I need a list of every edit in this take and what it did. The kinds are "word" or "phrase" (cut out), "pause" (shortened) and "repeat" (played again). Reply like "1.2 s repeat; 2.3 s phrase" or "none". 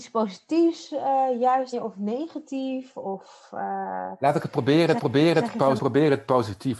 1.7 s word; 5.0 s repeat; 5.8 s word